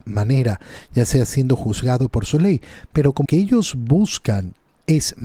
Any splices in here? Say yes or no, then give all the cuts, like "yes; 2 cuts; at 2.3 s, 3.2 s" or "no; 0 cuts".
yes; 1 cut; at 3.2 s